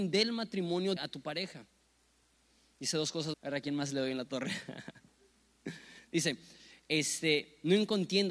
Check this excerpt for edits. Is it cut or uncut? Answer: cut